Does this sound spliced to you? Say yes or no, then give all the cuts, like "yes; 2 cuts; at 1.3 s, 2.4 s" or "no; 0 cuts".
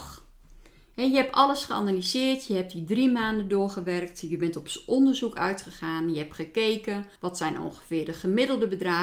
yes; 1 cut; at 7.2 s